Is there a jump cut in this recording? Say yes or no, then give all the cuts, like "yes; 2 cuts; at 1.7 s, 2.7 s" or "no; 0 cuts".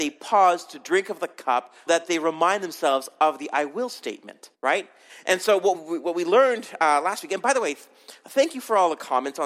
yes; 3 cuts; at 1.9 s, 4.5 s, 5.7 s